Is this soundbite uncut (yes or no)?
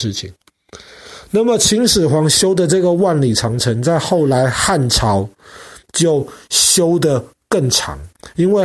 no